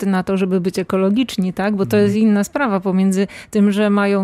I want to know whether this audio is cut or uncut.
uncut